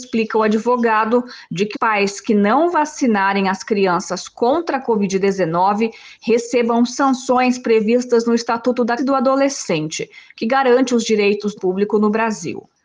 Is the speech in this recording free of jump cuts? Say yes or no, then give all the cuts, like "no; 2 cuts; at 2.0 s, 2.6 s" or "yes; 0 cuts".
no; 3 cuts; at 1.7 s, 9.0 s, 11.5 s